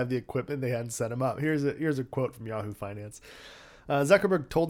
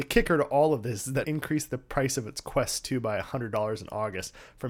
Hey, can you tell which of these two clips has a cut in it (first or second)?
second